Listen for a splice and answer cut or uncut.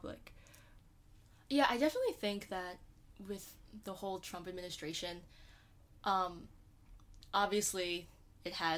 uncut